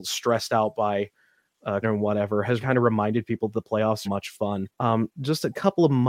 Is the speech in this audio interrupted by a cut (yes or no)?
yes